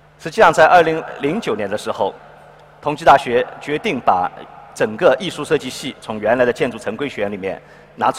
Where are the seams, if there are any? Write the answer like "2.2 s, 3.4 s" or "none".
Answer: none